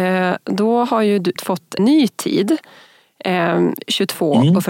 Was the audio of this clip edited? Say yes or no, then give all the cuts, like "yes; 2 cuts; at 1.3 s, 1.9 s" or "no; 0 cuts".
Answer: yes; 2 cuts; at 1.4 s, 1.8 s